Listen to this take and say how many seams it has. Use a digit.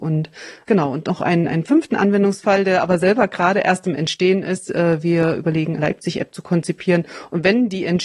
1